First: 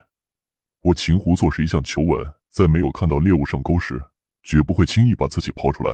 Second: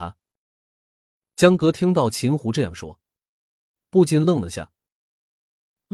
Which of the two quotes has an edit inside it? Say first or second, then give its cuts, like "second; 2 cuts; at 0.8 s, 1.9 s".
first; 2 cuts; at 2.4 s, 4.2 s